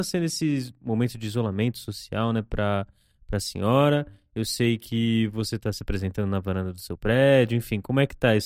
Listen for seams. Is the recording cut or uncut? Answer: uncut